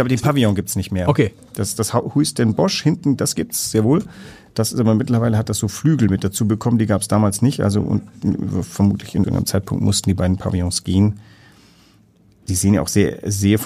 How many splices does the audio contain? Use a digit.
1